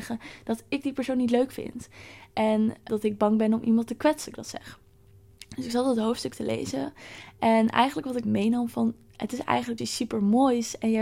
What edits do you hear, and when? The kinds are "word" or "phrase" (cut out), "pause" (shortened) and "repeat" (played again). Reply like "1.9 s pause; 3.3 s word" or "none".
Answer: 2.9 s word; 4.2 s word; 8.2 s word; 9.8 s word